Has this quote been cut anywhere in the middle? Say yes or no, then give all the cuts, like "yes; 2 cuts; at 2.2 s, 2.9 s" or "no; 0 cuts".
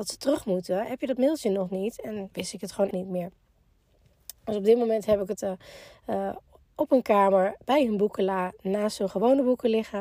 yes; 4 cuts; at 2.3 s, 2.9 s, 5.4 s, 7.6 s